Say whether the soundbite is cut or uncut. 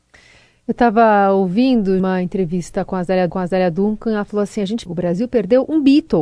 cut